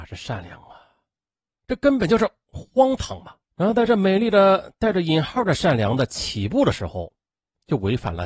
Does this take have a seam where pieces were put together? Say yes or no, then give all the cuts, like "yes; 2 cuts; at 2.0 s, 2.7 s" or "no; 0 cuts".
yes; 1 cut; at 3.4 s